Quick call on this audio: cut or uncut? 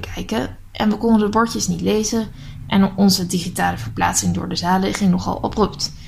uncut